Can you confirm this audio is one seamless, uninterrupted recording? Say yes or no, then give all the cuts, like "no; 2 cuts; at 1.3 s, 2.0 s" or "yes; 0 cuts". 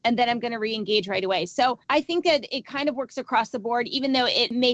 no; 1 cut; at 1.8 s